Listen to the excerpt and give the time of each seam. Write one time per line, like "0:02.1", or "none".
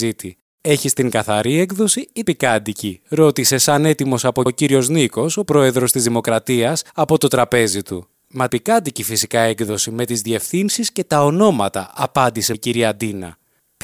0:02.2
0:04.5
0:05.5
0:06.9
0:08.5
0:12.5